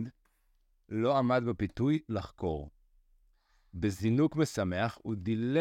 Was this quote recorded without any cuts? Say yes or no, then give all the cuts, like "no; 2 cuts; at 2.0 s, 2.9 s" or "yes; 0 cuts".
yes; 0 cuts